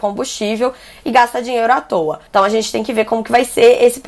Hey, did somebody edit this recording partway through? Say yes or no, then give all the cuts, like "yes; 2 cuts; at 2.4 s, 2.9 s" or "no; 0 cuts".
yes; 1 cut; at 2.3 s